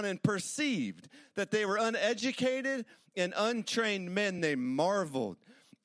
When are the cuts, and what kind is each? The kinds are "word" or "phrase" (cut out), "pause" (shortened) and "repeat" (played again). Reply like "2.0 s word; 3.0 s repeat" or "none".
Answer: none